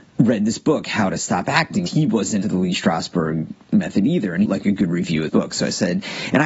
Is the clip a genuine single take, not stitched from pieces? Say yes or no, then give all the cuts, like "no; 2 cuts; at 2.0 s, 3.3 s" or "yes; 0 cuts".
no; 4 cuts; at 1.9 s, 2.4 s, 4.5 s, 5.3 s